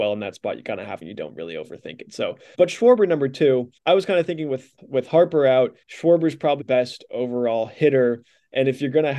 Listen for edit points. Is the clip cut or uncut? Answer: cut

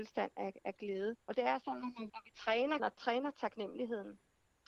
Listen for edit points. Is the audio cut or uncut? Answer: cut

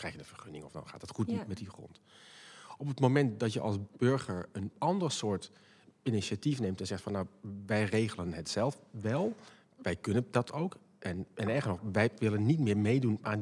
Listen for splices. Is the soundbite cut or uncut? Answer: uncut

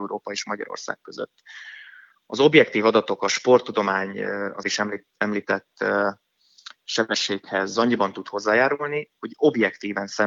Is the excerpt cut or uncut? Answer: cut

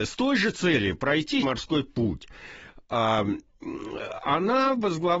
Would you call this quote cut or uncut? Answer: cut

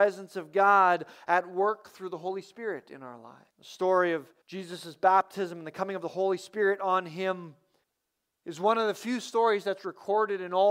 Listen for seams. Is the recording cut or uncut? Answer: cut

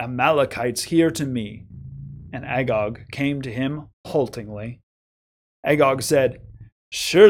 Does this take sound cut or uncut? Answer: uncut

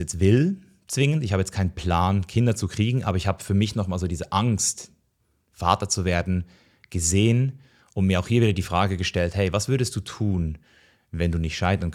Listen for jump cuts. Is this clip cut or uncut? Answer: uncut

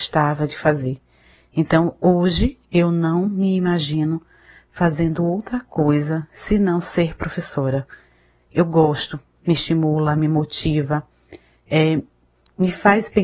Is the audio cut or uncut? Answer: uncut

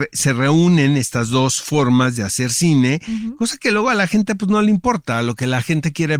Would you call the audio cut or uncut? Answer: uncut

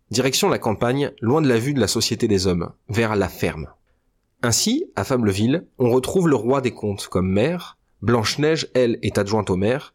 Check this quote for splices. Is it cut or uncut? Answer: uncut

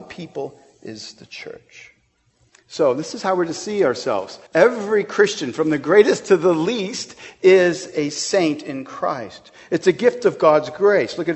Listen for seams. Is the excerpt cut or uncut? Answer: cut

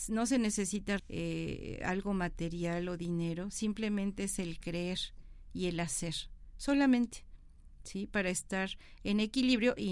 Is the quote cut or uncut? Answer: cut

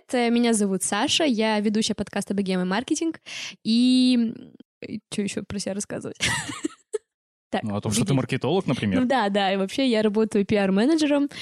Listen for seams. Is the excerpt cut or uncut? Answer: uncut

